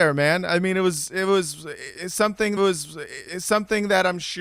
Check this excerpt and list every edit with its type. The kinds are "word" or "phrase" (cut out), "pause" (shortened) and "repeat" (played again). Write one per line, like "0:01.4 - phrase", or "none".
0:02.6 - repeat